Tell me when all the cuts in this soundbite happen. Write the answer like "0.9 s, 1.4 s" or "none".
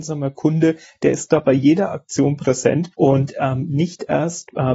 2.9 s